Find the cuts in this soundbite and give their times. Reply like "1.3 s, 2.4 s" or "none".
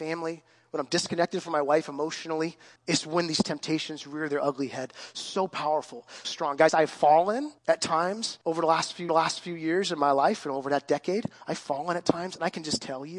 2.8 s, 6.2 s, 7.6 s, 8.4 s, 9.1 s